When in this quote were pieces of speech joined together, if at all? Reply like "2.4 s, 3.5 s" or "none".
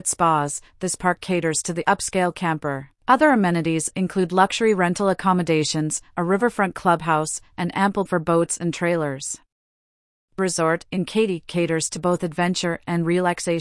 3.0 s, 8.1 s, 10.4 s